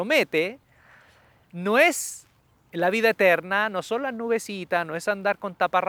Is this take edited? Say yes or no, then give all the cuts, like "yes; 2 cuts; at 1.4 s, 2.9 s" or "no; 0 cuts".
no; 0 cuts